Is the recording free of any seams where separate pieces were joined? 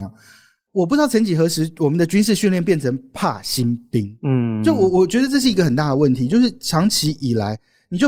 yes; 0 cuts

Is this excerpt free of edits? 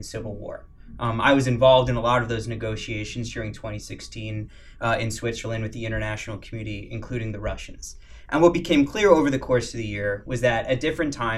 yes; 0 cuts

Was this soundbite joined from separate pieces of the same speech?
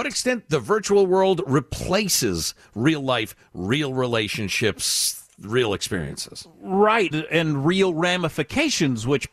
yes; 1 cut; at 7.1 s

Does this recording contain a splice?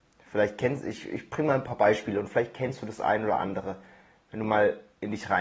no; 0 cuts

